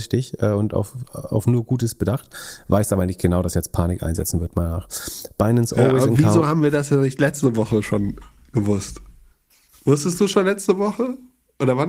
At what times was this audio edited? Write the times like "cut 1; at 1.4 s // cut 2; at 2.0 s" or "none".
cut 1; at 9.3 s